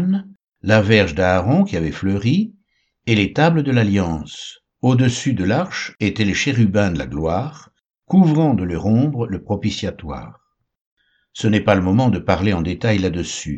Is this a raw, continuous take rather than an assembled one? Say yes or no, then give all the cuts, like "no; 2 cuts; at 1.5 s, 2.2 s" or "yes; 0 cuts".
no; 1 cut; at 4.7 s